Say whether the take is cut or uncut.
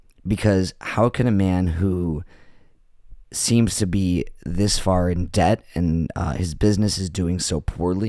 uncut